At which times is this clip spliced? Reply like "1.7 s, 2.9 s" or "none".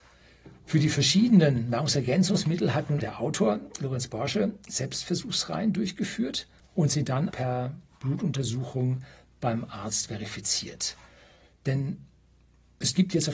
3.0 s, 6.6 s, 7.3 s